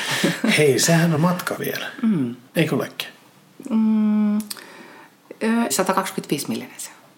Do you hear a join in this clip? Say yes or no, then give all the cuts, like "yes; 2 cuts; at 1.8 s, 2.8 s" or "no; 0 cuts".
yes; 4 cuts; at 1.2 s, 1.6 s, 2.5 s, 5.7 s